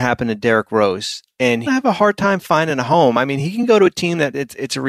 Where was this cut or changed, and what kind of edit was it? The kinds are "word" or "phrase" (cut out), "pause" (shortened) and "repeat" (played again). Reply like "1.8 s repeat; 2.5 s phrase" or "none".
1.7 s phrase